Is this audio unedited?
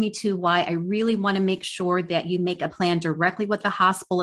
no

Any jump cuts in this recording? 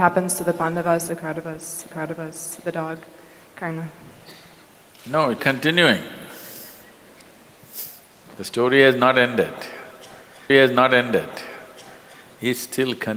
yes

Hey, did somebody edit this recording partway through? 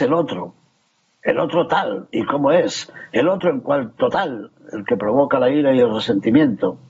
no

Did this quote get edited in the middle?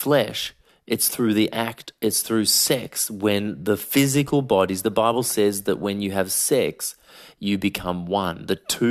no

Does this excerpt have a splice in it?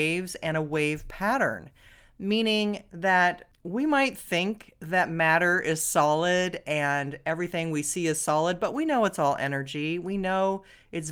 no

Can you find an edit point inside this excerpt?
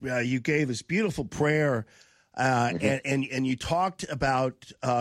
no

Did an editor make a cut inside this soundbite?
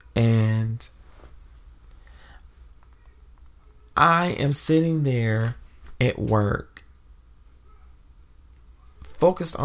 no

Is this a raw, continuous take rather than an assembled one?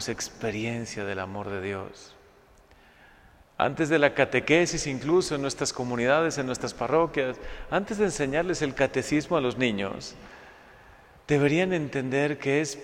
yes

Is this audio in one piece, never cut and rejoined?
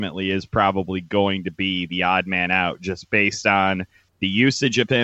yes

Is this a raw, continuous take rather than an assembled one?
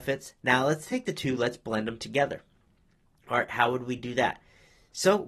yes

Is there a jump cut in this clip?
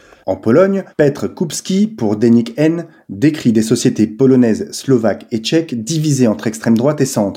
yes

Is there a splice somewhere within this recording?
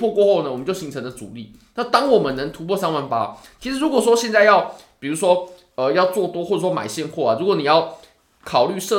no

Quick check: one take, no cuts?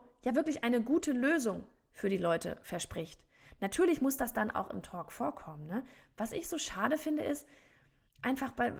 yes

